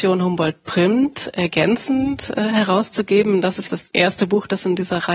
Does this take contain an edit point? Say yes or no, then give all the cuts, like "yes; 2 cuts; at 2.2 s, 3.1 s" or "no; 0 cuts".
yes; 1 cut; at 3.7 s